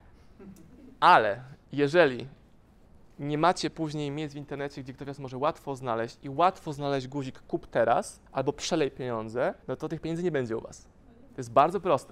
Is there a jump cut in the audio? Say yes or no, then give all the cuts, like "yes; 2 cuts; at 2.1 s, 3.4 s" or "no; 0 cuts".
yes; 3 cuts; at 1.6 s, 8.3 s, 9.6 s